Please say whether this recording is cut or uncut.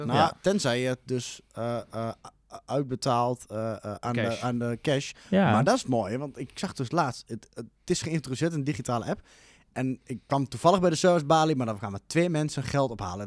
uncut